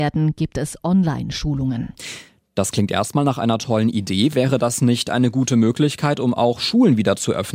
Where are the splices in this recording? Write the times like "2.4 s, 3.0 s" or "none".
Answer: none